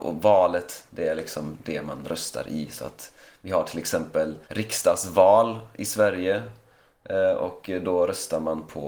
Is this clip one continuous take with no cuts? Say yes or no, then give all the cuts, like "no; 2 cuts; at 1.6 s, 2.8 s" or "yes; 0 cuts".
no; 1 cut; at 4.4 s